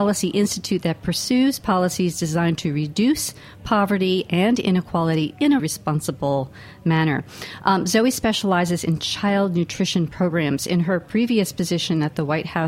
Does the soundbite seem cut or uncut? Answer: cut